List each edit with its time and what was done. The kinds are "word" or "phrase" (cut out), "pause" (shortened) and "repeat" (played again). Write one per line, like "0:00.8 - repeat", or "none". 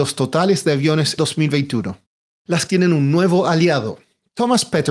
0:01.2 - word
0:02.7 - word